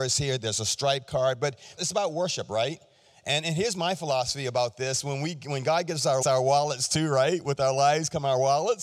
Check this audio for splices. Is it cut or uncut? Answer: cut